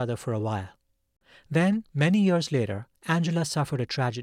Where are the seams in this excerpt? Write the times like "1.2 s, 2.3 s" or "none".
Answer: 1.9 s, 2.9 s